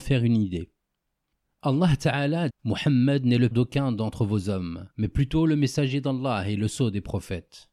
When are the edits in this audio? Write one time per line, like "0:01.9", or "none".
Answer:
0:01.4
0:02.5
0:03.5
0:04.9